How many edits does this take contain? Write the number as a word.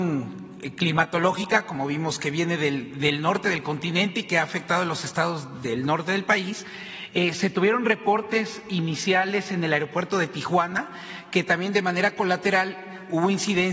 zero